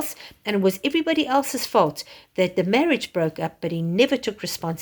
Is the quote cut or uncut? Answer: uncut